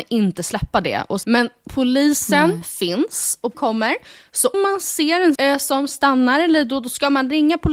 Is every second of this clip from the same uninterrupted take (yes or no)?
no